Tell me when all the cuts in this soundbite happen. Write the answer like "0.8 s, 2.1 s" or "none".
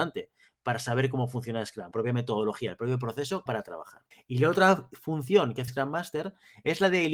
1.9 s, 3.5 s, 4.1 s, 5.7 s